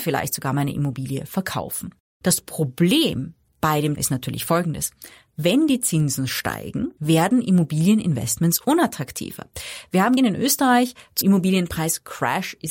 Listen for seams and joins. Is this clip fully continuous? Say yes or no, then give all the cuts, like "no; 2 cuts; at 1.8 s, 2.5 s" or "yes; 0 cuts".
no; 4 cuts; at 4.0 s, 7.0 s, 10.2 s, 11.2 s